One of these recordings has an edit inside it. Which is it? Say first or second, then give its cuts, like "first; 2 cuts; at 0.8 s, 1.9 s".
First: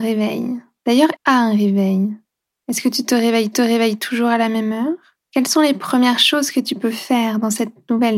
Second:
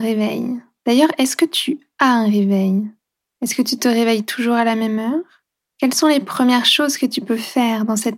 first; 3 cuts; at 1.2 s, 3.5 s, 5.2 s